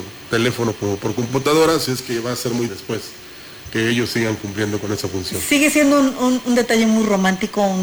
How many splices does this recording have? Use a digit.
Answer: 1